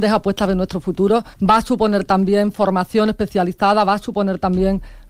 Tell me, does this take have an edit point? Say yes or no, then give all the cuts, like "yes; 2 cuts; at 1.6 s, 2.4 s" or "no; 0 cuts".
yes; 1 cut; at 1.3 s